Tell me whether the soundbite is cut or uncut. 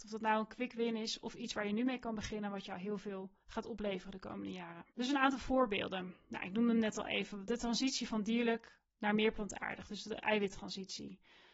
cut